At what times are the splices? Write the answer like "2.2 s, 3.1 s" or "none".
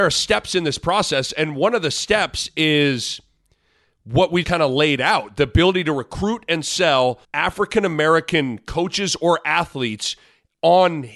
4.4 s, 7.2 s